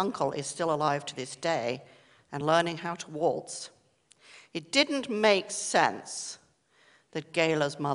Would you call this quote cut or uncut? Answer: uncut